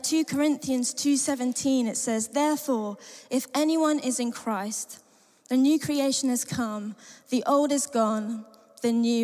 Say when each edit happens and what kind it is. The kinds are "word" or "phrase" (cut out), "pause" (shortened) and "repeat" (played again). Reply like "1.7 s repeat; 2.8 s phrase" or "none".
none